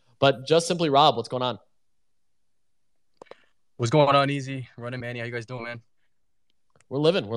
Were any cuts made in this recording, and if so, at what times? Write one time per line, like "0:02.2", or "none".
0:05.0

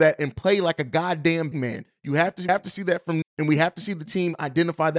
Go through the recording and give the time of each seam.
0:01.5
0:02.5
0:03.2

